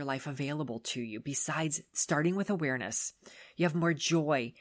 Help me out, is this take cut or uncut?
uncut